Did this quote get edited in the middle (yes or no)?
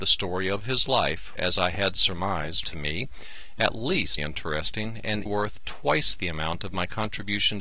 yes